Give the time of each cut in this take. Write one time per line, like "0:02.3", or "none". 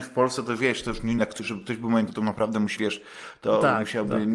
0:01.2
0:02.1
0:02.8